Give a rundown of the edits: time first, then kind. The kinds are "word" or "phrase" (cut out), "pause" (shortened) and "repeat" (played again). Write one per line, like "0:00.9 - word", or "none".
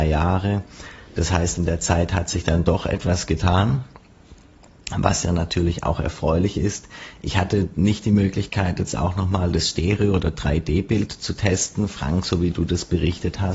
none